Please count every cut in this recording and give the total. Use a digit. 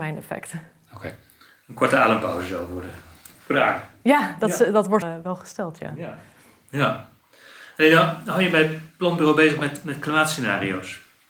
1